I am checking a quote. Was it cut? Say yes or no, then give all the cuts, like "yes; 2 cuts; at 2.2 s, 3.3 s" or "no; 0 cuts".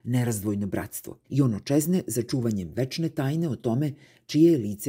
yes; 1 cut; at 1.2 s